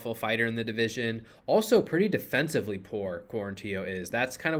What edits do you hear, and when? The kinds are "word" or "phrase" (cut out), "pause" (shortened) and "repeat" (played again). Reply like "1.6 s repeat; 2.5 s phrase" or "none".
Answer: none